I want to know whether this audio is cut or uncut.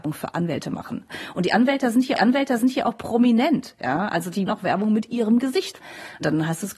cut